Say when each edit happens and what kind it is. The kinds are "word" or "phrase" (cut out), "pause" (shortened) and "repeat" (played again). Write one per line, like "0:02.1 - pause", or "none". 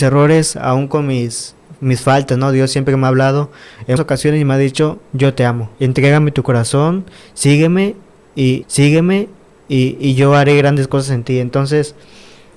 0:04.0 - word
0:05.0 - pause
0:05.7 - pause
0:08.6 - repeat